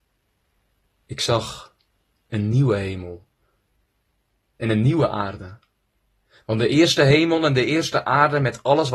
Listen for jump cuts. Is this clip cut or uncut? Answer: uncut